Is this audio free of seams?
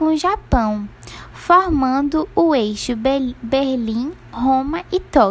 yes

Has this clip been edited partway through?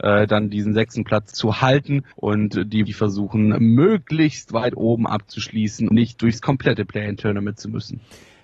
yes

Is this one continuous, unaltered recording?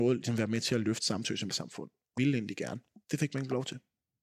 no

